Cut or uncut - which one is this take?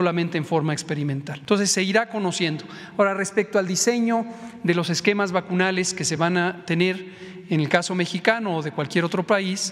uncut